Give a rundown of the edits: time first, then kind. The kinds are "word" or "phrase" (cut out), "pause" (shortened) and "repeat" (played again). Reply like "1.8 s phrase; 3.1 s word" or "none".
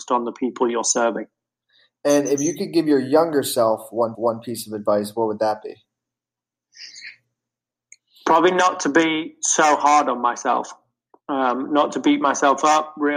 4.1 s repeat